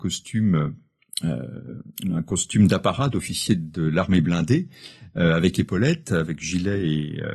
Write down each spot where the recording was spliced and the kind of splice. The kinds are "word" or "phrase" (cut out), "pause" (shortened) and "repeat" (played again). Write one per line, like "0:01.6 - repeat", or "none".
none